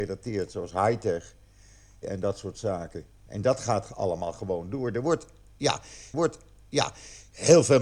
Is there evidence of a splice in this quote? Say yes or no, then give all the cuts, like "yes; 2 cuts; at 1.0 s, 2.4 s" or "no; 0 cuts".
yes; 2 cuts; at 2.0 s, 6.1 s